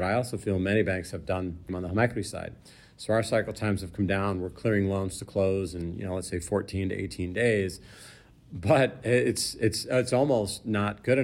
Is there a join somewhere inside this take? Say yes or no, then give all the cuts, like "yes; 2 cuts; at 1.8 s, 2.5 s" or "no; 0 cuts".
yes; 1 cut; at 1.7 s